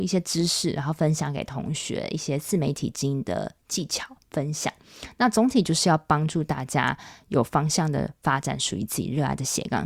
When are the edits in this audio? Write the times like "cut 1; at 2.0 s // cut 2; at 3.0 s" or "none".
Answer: none